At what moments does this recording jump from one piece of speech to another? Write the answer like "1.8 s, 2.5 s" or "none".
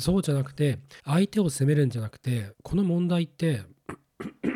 1.0 s, 2.5 s